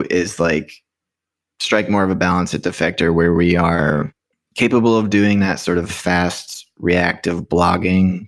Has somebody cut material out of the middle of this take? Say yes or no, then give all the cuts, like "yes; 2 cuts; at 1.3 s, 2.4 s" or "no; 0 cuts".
no; 0 cuts